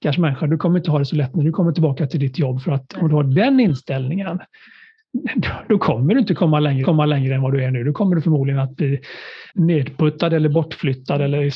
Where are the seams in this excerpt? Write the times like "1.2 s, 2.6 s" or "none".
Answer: 6.8 s, 9.5 s

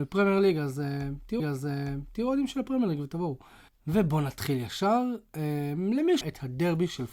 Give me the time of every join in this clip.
1.4 s, 3.7 s, 6.2 s

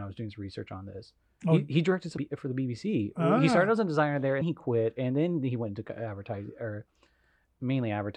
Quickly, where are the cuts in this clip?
2.2 s, 4.4 s

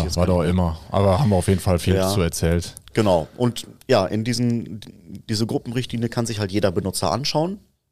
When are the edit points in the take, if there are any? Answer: none

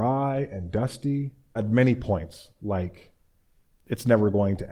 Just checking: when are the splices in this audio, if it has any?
1.6 s

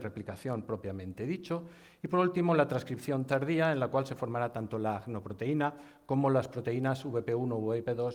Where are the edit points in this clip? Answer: none

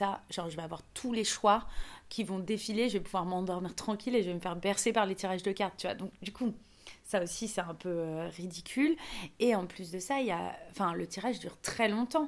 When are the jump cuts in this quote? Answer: none

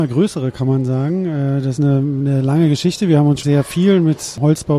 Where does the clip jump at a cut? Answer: 1.8 s, 3.4 s

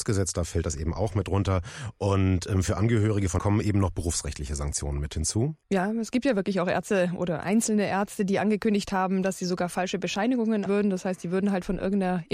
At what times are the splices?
3.4 s, 5.6 s, 10.7 s

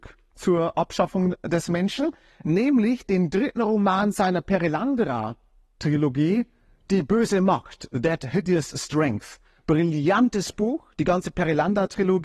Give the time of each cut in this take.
none

